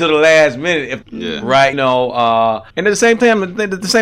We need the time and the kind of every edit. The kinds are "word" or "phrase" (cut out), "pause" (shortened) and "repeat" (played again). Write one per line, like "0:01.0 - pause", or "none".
0:01.0 - phrase
0:01.7 - word
0:02.7 - pause